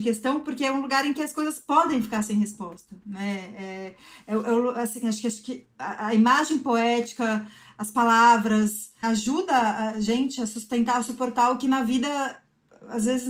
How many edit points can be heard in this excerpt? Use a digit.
1